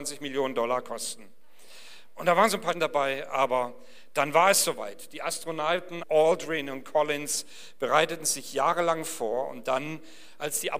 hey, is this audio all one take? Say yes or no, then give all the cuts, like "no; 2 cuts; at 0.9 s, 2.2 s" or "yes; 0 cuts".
no; 2 cuts; at 2.7 s, 6.0 s